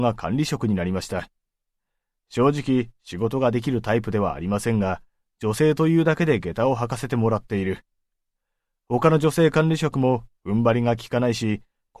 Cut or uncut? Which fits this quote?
uncut